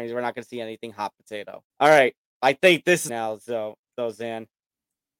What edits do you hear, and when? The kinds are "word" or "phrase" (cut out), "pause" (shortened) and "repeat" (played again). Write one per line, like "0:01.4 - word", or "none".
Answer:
0:01.7 - pause
0:03.1 - phrase